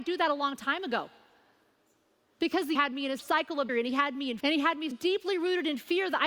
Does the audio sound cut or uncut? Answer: cut